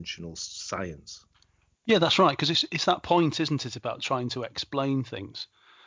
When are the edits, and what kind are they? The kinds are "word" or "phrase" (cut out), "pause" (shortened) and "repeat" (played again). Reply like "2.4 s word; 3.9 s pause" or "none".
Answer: none